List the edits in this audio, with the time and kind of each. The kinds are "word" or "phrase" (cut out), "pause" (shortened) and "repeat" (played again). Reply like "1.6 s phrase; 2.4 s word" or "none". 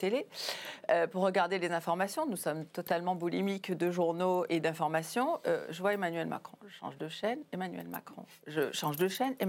4.5 s word